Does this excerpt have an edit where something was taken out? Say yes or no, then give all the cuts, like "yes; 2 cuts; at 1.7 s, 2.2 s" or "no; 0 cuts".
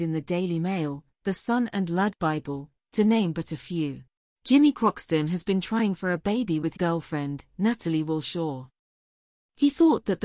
yes; 2 cuts; at 4.2 s, 6.7 s